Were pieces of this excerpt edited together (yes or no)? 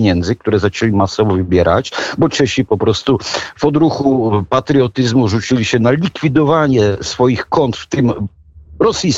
no